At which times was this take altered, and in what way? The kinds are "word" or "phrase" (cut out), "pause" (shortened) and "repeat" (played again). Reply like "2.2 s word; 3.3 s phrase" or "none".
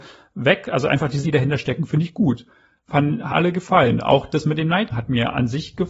1.2 s word; 3.3 s word; 4.9 s word